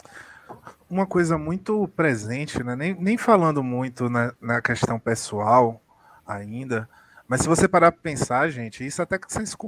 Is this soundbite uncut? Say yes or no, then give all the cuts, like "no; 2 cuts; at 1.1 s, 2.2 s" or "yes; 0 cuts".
yes; 0 cuts